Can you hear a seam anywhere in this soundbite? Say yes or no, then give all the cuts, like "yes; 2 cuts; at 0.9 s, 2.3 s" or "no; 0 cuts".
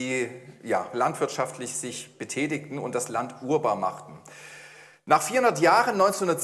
no; 0 cuts